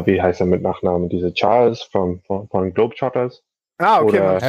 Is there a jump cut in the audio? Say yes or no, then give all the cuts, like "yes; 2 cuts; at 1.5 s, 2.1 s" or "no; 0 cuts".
no; 0 cuts